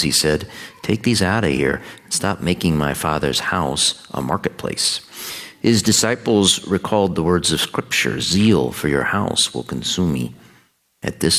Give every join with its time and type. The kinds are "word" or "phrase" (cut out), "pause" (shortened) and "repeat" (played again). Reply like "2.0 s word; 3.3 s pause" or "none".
none

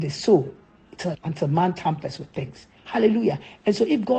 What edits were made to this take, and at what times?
1.1 s word; 2.8 s pause

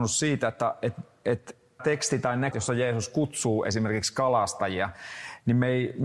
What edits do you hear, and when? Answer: 1.8 s word; 2.5 s word

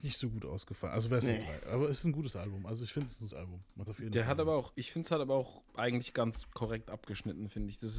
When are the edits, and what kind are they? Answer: 3.3 s word; 3.9 s word; 4.7 s word; 5.7 s pause

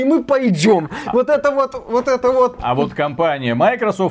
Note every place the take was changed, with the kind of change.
none

